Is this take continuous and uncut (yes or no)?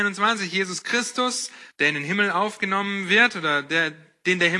no